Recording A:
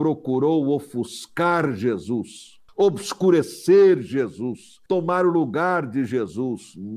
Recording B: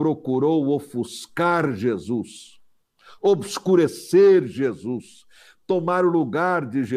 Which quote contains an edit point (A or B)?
A